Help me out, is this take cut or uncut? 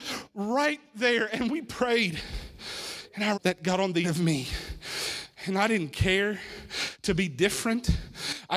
cut